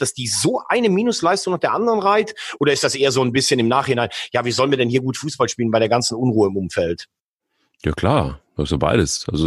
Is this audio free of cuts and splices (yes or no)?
yes